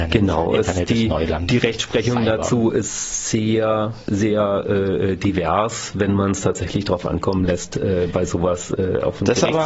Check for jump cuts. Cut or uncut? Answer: uncut